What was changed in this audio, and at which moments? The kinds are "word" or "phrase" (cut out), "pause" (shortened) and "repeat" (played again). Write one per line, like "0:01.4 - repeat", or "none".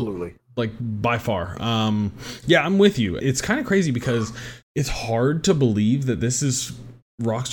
0:03.2 - word
0:04.6 - pause